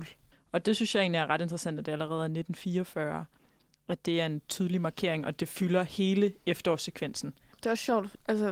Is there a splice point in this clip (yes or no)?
no